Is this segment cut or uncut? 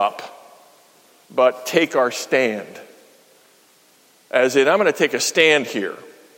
uncut